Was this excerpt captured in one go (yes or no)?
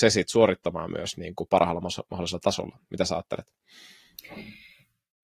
yes